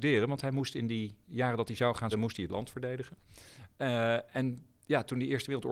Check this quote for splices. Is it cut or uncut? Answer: cut